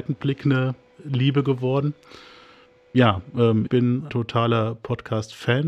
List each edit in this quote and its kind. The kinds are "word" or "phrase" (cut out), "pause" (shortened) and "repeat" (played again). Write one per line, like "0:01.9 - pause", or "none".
0:03.7 - word
0:04.1 - word